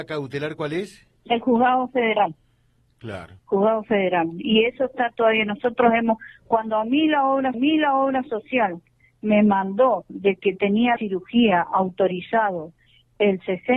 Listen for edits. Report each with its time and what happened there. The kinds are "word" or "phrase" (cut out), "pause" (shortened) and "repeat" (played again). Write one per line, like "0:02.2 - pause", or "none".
0:01.2 - pause
0:03.4 - pause
0:07.5 - repeat
0:11.0 - word